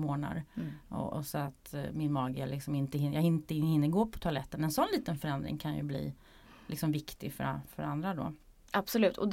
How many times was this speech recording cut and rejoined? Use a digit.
0